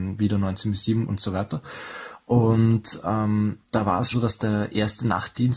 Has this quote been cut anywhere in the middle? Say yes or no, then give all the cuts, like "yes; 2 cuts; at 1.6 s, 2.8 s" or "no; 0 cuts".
yes; 3 cuts; at 1.1 s, 3.6 s, 4.1 s